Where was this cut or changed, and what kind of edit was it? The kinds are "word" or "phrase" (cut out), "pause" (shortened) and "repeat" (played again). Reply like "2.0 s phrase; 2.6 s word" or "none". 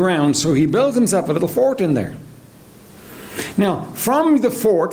none